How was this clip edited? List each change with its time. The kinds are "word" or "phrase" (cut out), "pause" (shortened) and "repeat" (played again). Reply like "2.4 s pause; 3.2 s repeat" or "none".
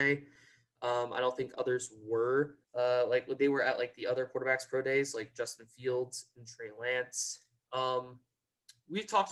2.6 s pause